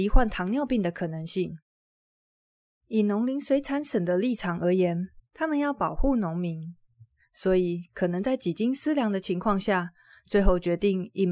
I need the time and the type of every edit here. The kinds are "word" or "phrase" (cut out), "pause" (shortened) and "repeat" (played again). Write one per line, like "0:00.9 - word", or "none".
none

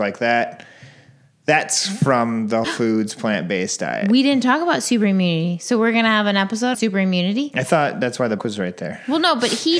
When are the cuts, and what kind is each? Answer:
0:02.6 - word
0:06.7 - word
0:08.4 - word

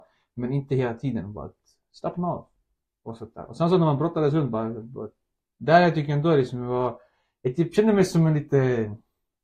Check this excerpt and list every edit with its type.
none

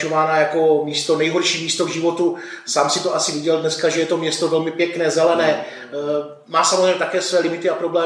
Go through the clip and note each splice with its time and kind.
none

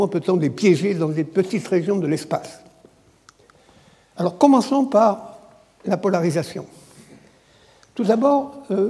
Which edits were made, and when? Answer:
none

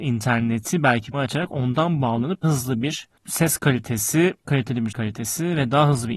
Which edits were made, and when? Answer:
0:01.1 - word
0:02.4 - word
0:04.4 - word
0:04.9 - word

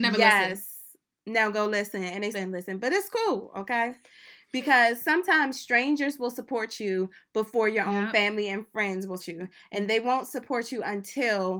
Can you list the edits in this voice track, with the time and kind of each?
0:02.3 - word
0:09.2 - word

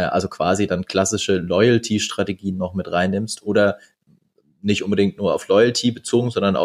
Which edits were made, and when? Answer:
none

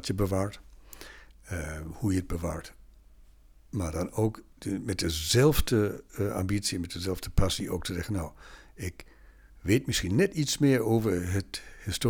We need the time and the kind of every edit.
none

